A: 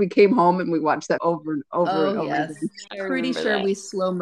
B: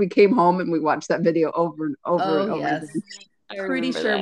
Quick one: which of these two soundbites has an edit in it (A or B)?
A